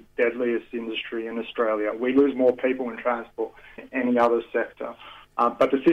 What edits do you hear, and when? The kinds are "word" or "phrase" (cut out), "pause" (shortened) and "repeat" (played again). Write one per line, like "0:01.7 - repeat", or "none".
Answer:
0:03.8 - word